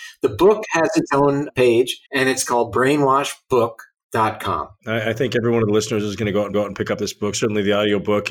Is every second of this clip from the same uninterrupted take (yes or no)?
no